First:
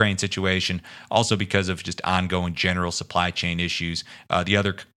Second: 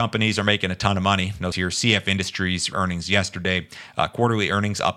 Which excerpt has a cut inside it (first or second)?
second